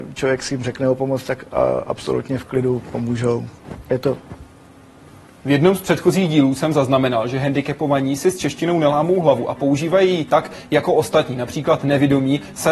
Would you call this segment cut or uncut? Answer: uncut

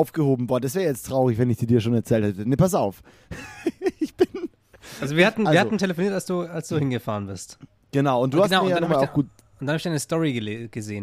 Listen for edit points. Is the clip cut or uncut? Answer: uncut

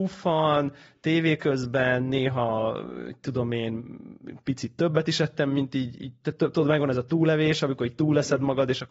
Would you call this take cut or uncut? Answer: uncut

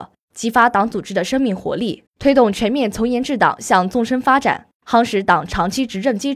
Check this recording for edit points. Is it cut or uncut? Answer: cut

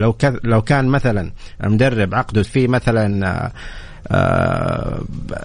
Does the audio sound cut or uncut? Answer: cut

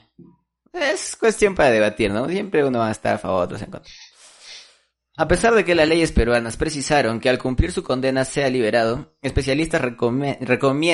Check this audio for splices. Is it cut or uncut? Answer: uncut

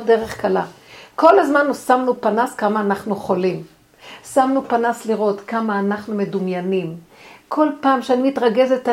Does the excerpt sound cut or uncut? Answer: uncut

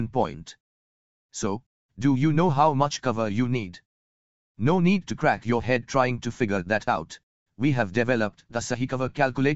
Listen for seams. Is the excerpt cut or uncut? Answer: uncut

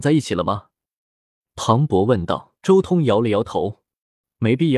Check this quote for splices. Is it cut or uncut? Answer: cut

